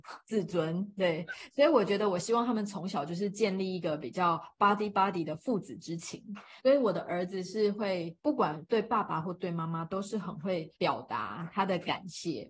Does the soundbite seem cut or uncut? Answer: uncut